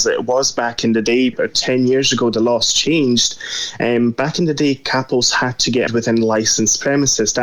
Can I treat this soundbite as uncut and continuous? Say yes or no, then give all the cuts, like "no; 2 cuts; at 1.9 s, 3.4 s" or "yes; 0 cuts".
no; 2 cuts; at 1.3 s, 5.9 s